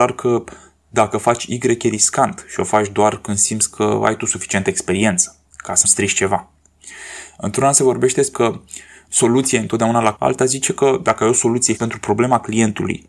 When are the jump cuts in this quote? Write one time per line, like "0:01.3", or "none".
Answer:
0:05.5
0:05.8
0:08.3
0:09.1
0:10.2
0:11.8